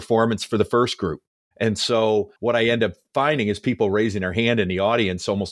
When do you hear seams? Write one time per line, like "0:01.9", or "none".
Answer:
0:01.3
0:02.4